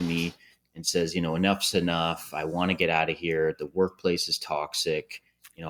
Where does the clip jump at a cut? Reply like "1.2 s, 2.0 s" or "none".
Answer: none